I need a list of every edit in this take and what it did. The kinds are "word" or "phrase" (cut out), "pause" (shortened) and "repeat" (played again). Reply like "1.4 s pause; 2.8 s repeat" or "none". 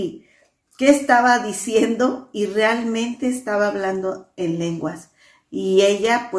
none